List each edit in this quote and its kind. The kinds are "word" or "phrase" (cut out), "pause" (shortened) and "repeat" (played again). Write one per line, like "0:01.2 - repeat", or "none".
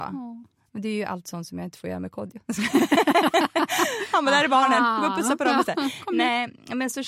none

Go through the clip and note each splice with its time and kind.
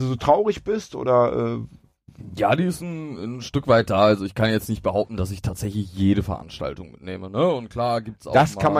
none

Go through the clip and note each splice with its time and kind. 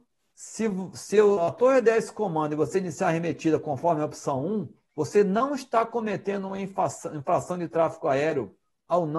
0:04.9 - pause

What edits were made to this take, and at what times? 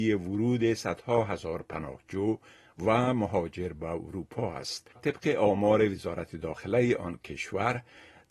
0:05.0 - word

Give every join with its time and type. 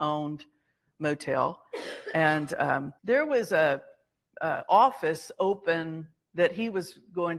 0:03.0 - pause

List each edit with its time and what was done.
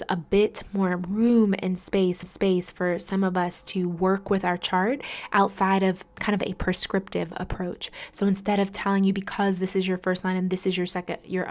0:02.2 - repeat
0:06.1 - word

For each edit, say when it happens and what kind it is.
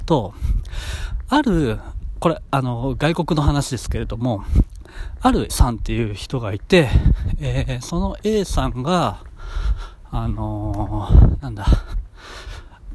0:05.5 - word

